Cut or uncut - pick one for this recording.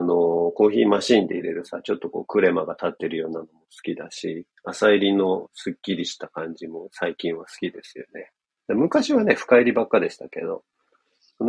uncut